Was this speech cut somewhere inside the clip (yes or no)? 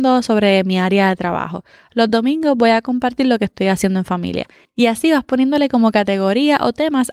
no